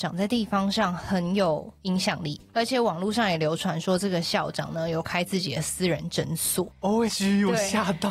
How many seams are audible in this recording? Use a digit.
1